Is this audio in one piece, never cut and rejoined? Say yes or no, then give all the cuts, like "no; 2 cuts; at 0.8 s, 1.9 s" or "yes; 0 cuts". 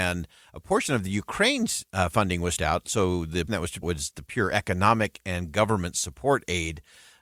no; 4 cuts; at 2.6 s, 3.5 s, 3.8 s, 4.1 s